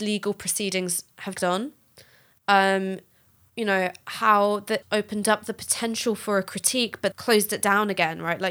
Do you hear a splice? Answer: yes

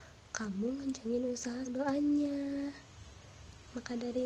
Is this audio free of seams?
no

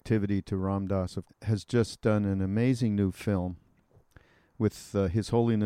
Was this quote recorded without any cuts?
no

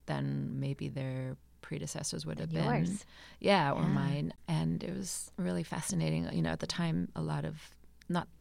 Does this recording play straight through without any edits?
no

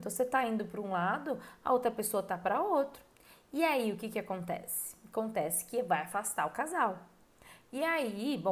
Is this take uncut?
yes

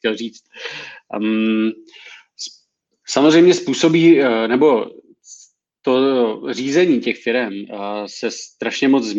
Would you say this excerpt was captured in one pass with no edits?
yes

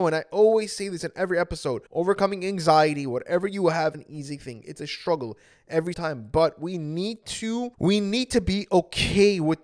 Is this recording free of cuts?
no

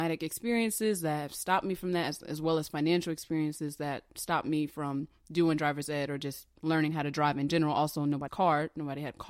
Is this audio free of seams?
no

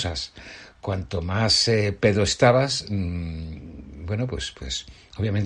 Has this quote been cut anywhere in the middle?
no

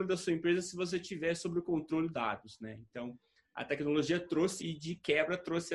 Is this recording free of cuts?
no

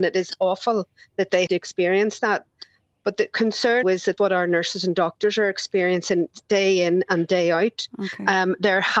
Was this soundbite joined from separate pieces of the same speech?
yes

